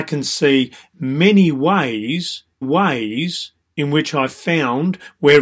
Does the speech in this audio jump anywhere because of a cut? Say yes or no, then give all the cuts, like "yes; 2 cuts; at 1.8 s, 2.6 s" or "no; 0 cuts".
yes; 1 cut; at 2.6 s